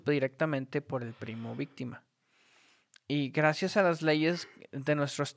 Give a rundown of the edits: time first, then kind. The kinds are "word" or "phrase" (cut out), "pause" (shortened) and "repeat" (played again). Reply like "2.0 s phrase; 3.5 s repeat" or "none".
none